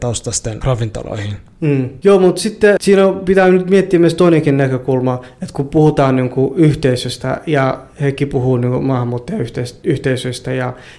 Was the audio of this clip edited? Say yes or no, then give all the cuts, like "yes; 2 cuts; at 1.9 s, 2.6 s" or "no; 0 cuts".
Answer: yes; 1 cut; at 2.8 s